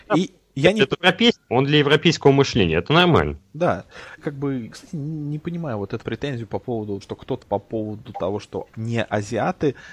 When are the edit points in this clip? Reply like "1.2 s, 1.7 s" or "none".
0.9 s, 1.5 s, 4.2 s, 4.7 s, 6.0 s, 7.0 s, 7.4 s, 8.7 s